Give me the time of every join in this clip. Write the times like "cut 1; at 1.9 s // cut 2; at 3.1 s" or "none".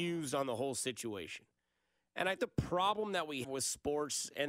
cut 1; at 2.4 s // cut 2; at 3.4 s